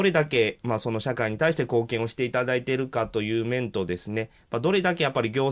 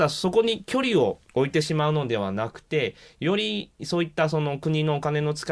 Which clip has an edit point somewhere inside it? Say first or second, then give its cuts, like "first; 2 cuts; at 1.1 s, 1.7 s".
second; 1 cut; at 1.2 s